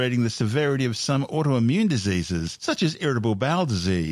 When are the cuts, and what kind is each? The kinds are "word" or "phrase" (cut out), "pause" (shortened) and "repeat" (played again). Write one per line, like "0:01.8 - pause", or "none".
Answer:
none